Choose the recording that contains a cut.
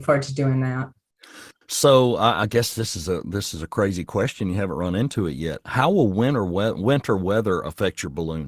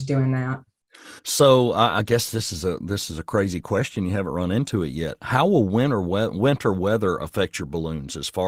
second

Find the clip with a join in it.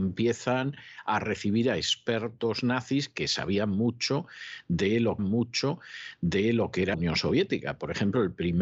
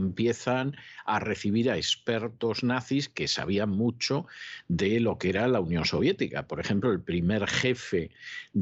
first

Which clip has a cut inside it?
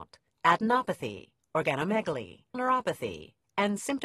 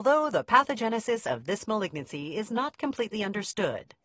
first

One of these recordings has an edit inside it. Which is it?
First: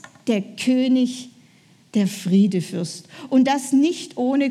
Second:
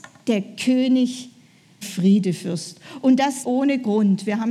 second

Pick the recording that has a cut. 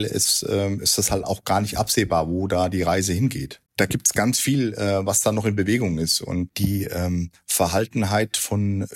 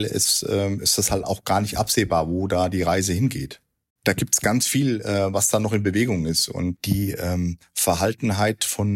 first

